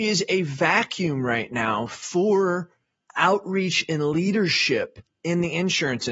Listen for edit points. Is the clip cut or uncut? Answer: uncut